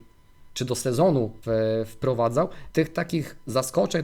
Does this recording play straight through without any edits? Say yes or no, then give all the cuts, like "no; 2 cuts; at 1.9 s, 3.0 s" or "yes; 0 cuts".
no; 2 cuts; at 1.4 s, 2.7 s